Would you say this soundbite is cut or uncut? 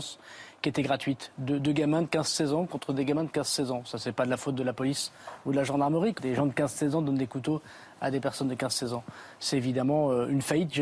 cut